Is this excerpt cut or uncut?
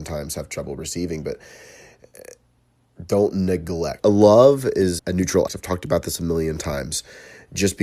cut